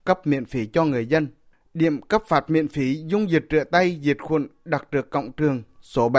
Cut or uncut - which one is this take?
uncut